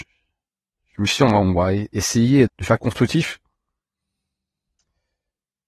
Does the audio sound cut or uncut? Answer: cut